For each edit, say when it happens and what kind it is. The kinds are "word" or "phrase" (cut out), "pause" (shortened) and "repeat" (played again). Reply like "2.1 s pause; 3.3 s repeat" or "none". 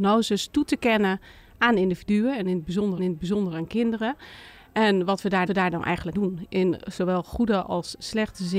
3.0 s repeat; 5.5 s repeat; 6.1 s word